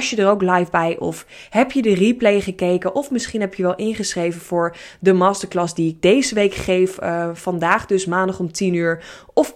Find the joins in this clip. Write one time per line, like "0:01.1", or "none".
none